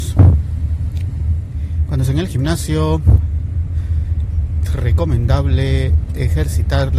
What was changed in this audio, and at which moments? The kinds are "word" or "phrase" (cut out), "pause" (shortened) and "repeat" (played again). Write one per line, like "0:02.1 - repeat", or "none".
0:02.0 - word
0:04.7 - word